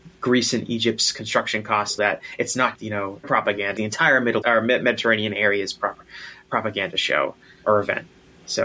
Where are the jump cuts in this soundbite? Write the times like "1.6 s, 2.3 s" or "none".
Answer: 2.0 s, 2.7 s, 3.2 s, 3.8 s, 4.4 s, 7.6 s